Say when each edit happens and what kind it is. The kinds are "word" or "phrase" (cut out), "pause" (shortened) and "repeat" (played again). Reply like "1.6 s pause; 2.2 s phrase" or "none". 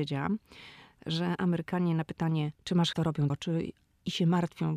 2.5 s pause; 2.9 s word; 3.3 s phrase